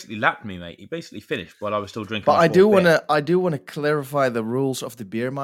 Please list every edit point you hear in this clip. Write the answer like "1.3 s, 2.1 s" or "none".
none